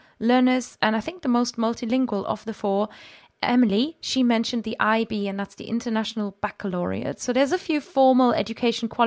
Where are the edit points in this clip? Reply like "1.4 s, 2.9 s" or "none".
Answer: none